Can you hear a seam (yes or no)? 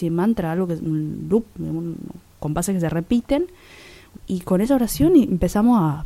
yes